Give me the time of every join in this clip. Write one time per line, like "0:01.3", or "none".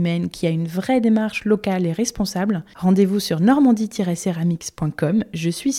none